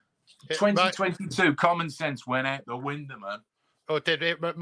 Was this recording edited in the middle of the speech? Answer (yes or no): no